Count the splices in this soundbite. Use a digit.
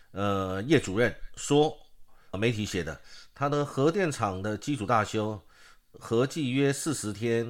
1